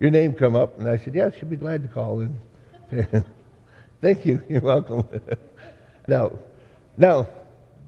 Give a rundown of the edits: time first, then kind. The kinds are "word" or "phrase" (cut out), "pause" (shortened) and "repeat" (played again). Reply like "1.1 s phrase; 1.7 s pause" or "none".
3.3 s pause; 6.1 s phrase